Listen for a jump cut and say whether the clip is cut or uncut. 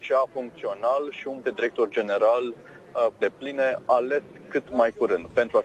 cut